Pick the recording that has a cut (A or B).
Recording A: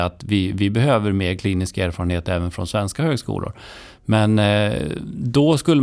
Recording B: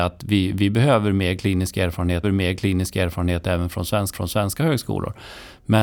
B